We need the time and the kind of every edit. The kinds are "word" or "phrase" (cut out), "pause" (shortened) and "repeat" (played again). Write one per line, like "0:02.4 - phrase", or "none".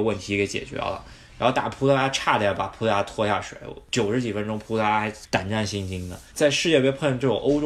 0:06.3 - pause